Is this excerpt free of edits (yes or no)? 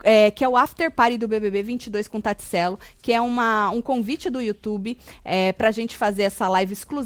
yes